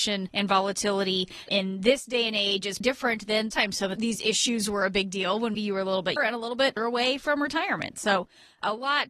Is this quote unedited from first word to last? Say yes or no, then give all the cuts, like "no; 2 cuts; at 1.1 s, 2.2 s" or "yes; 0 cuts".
no; 6 cuts; at 1.5 s, 2.8 s, 3.5 s, 5.5 s, 6.2 s, 6.8 s